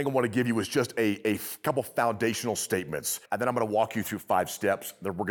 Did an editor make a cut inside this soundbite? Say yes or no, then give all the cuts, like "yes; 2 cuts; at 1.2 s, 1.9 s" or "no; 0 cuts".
yes; 1 cut; at 3.3 s